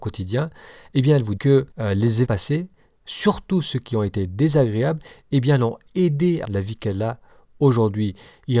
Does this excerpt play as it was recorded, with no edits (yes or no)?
no